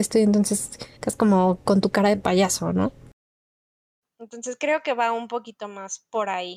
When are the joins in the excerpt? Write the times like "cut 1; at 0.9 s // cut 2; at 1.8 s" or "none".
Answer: cut 1; at 1.0 s